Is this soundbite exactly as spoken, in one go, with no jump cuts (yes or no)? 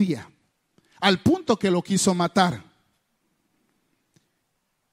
yes